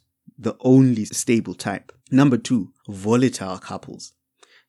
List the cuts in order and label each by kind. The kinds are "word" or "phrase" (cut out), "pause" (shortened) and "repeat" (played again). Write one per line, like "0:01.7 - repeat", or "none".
0:01.1 - word
0:02.0 - pause
0:02.8 - pause